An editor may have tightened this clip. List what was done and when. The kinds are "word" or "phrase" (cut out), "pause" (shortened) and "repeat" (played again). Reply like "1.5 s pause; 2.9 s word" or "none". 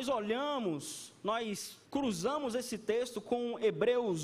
1.9 s pause

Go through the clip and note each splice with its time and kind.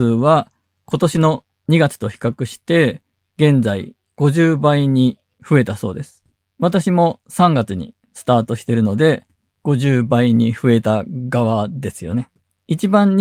none

